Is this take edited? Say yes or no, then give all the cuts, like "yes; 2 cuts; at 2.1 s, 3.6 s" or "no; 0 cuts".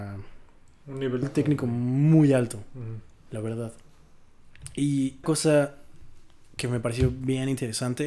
yes; 2 cuts; at 1.2 s, 5.2 s